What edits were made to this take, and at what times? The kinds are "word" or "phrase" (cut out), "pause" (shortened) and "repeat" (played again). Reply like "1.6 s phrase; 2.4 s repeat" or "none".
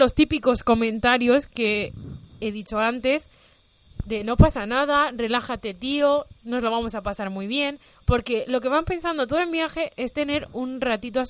none